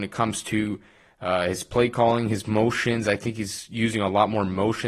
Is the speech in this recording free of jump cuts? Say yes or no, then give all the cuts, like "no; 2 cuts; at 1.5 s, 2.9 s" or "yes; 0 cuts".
yes; 0 cuts